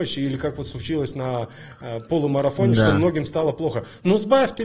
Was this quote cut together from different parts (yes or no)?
no